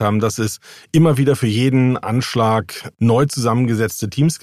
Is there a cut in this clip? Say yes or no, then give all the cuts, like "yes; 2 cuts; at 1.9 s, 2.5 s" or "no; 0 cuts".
no; 0 cuts